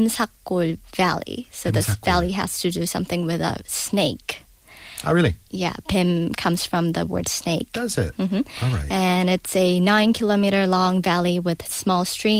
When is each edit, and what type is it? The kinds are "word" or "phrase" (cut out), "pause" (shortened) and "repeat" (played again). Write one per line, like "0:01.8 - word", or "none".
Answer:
none